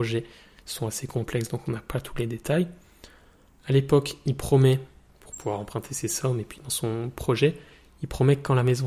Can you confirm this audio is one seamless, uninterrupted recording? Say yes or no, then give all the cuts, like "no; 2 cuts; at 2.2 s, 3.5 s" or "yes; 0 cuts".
yes; 0 cuts